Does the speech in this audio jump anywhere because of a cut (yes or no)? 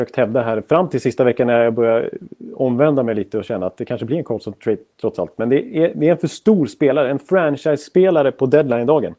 no